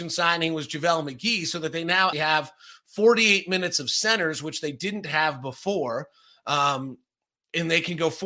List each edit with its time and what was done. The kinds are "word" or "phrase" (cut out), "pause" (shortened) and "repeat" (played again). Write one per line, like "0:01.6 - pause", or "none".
0:02.1 - word

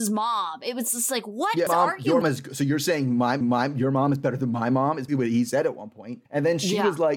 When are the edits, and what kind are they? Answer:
0:01.7 - phrase
0:02.2 - word
0:03.4 - repeat
0:05.1 - word
0:06.3 - pause

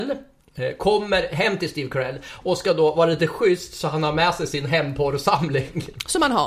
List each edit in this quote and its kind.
none

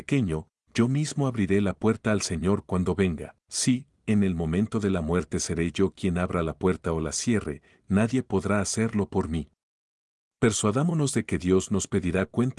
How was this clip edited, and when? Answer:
0:03.4 - pause

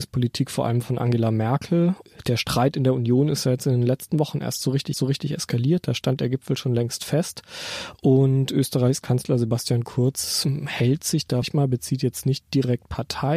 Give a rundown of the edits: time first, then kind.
0:04.9 - repeat
0:11.4 - phrase

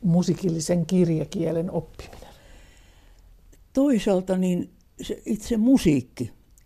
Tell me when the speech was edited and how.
none

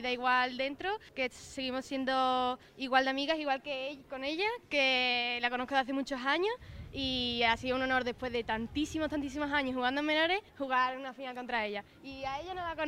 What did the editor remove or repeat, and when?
0:01.1 - pause
0:02.7 - pause
0:10.5 - pause

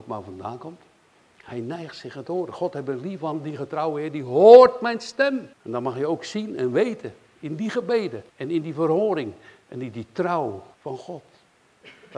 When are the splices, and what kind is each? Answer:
0:05.5 - pause
0:08.3 - pause
0:10.7 - pause

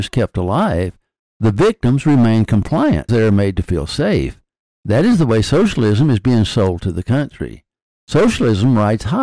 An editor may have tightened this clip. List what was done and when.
0:03.1 - word

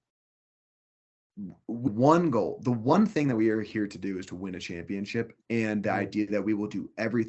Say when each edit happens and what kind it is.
0:01.9 - word
0:05.4 - pause

